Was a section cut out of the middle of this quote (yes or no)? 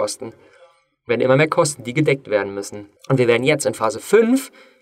yes